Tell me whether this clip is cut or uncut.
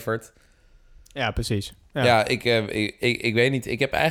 uncut